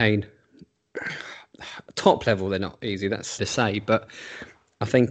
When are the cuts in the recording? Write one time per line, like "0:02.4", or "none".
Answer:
0:03.4